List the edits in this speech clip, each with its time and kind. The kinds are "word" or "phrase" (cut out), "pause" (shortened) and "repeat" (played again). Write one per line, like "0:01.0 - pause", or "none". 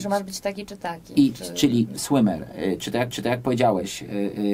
0:02.0 - word
0:03.1 - repeat